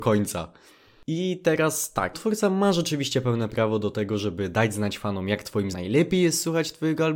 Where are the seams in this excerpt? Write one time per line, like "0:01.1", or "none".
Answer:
0:02.1
0:05.7